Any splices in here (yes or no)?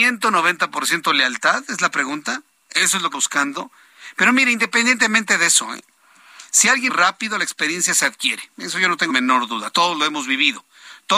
yes